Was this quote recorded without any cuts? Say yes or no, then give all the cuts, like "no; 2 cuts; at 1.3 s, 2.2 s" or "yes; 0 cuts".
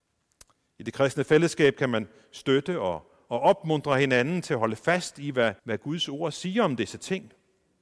no; 1 cut; at 5.6 s